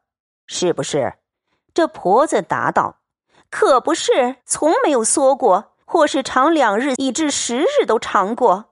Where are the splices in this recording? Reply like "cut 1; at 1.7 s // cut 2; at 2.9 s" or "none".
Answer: cut 1; at 1.3 s // cut 2; at 4.4 s // cut 3; at 5.8 s // cut 4; at 7.0 s